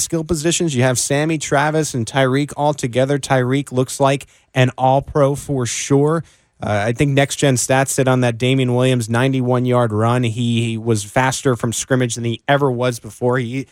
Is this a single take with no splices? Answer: yes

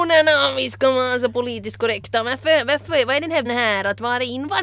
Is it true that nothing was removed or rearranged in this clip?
no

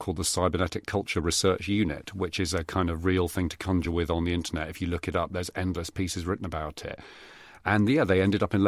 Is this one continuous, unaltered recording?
yes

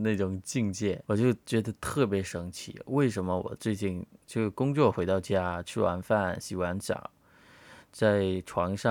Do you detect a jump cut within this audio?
no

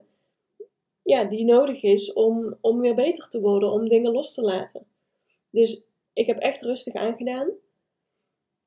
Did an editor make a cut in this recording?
no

